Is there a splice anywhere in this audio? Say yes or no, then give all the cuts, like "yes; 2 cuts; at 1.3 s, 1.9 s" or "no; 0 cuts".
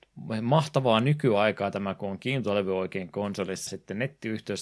yes; 1 cut; at 3.7 s